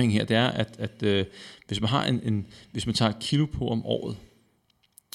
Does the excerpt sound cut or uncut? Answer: uncut